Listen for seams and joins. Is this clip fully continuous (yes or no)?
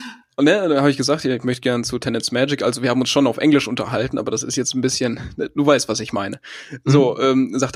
yes